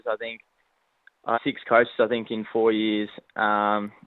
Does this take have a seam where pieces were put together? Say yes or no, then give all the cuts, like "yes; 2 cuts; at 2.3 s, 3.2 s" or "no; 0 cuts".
yes; 1 cut; at 1.3 s